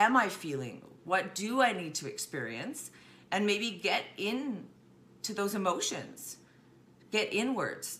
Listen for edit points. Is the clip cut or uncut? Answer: uncut